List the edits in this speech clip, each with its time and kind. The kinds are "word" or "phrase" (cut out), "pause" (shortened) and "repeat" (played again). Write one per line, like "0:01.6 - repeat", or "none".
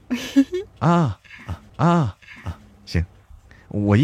0:01.7 - repeat